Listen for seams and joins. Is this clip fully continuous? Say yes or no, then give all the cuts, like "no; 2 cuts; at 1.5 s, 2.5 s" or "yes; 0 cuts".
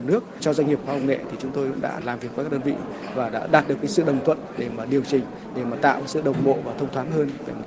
yes; 0 cuts